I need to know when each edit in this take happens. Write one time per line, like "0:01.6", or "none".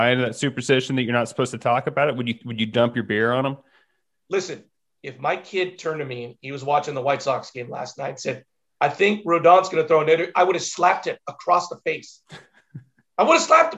none

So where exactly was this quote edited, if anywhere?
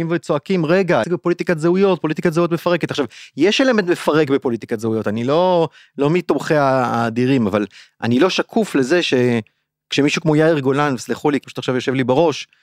0:01.0
0:11.4

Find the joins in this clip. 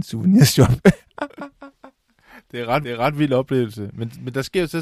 0:02.8

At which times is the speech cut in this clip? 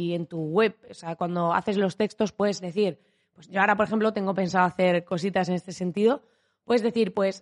none

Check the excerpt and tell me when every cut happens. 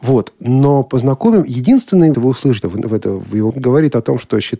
0:02.1
0:02.6
0:03.5

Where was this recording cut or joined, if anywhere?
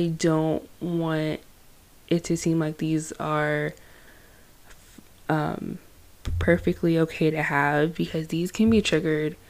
none

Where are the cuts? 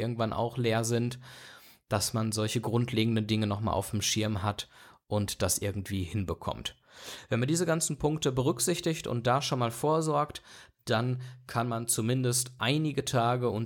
none

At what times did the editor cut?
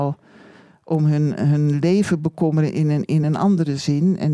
none

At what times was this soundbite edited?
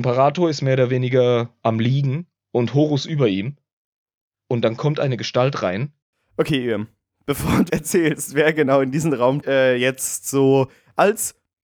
0:07.7
0:09.4

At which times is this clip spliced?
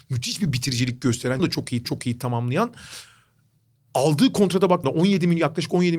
0:01.4
0:01.8
0:04.8

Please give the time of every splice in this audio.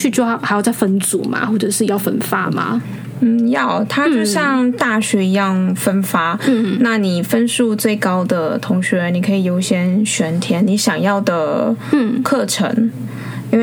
none

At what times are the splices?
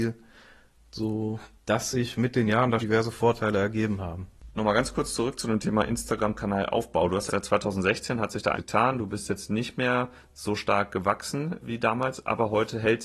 0:02.8
0:07.3
0:08.5
0:11.6

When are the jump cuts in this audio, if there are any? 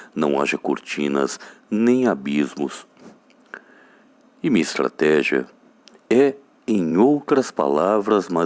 none

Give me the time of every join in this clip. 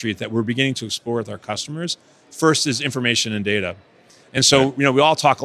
none

